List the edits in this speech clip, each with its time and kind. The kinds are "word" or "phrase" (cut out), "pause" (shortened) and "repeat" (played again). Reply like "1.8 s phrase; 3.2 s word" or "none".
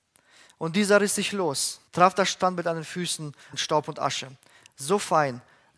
1.9 s pause; 3.5 s phrase